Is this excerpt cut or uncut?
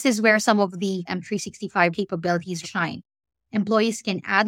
cut